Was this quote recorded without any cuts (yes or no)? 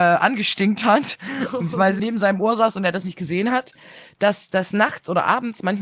no